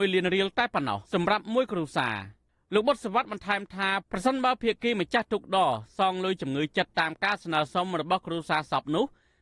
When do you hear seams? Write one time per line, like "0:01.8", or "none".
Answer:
0:01.0